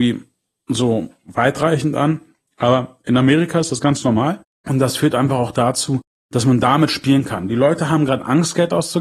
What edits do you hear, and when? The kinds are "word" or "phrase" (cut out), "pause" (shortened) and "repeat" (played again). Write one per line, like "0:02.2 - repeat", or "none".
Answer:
none